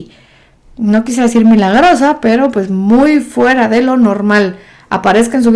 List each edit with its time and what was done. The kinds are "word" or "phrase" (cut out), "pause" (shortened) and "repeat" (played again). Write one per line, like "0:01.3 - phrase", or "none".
none